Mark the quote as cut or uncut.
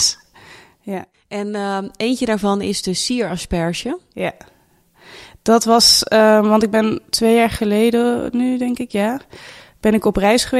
uncut